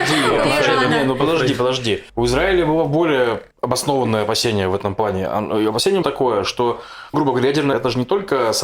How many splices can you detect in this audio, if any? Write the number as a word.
five